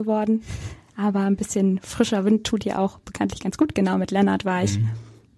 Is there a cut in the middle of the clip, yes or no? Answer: no